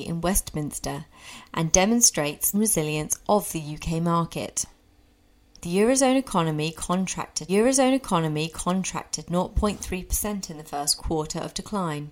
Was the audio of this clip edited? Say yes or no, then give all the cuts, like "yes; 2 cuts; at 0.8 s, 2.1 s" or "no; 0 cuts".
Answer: yes; 3 cuts; at 2.5 s, 7.5 s, 11.0 s